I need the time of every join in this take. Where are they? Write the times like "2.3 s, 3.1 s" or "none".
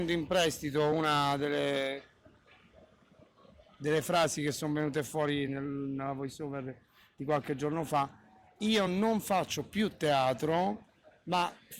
none